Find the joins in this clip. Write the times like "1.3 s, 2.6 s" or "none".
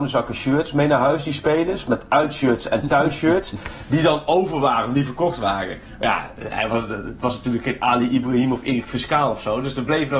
none